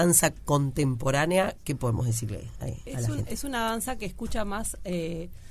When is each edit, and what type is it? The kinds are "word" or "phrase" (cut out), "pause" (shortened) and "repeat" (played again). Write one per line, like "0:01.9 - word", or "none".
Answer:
none